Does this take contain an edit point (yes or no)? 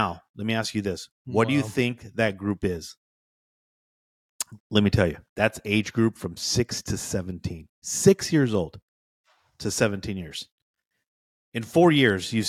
yes